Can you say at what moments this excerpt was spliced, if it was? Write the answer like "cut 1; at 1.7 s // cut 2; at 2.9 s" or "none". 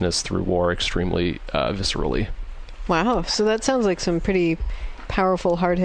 none